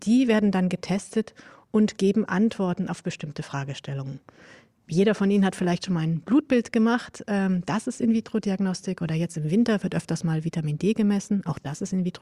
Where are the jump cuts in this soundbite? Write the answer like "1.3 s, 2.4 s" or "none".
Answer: none